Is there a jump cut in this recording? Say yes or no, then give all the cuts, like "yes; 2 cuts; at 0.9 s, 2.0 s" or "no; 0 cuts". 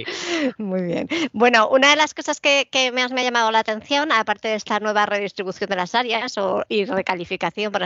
no; 0 cuts